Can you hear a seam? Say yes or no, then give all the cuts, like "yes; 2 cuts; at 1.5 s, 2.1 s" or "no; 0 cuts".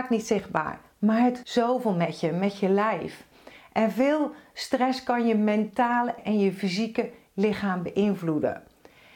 yes; 2 cuts; at 1.4 s, 6.2 s